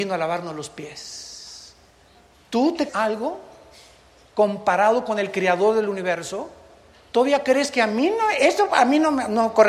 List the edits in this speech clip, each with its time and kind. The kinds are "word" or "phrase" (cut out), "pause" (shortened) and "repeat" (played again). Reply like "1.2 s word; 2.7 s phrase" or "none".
2.9 s word